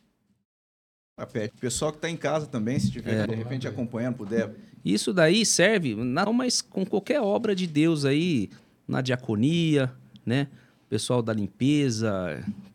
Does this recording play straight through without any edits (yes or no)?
no